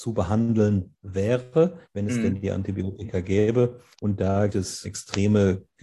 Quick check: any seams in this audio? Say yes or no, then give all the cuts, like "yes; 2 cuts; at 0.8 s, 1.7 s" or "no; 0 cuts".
yes; 4 cuts; at 1.8 s, 3.9 s, 4.5 s, 4.8 s